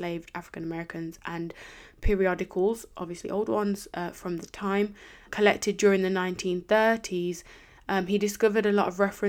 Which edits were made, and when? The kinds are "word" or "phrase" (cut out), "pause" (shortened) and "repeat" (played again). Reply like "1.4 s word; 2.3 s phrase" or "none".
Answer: 5.3 s word